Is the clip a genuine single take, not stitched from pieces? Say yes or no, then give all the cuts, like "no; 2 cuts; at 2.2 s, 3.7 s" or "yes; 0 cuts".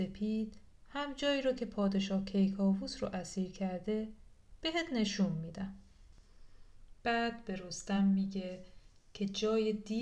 yes; 0 cuts